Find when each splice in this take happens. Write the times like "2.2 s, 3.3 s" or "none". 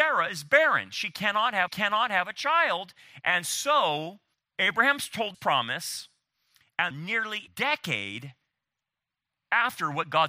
1.7 s, 4.3 s, 5.3 s, 6.9 s, 7.5 s